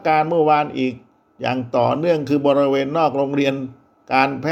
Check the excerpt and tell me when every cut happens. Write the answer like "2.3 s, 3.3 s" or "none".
none